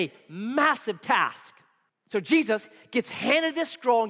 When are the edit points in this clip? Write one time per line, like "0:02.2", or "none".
0:01.9